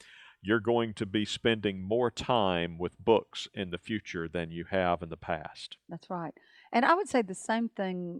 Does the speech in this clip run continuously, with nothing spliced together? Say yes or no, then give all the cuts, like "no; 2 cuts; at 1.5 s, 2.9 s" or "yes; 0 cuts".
yes; 0 cuts